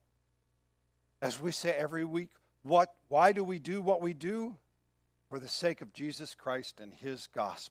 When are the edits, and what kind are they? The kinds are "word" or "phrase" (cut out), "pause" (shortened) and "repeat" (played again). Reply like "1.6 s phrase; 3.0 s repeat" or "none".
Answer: none